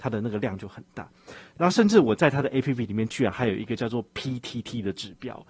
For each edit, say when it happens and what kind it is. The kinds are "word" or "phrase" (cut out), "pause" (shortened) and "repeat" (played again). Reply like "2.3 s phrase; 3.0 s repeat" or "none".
none